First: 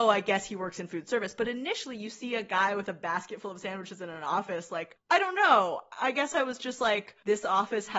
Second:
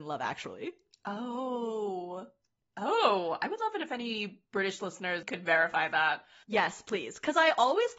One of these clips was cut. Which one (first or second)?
first